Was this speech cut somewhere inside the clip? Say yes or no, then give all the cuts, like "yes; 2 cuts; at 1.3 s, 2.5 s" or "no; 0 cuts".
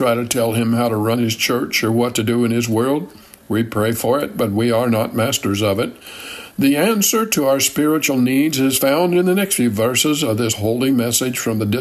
no; 0 cuts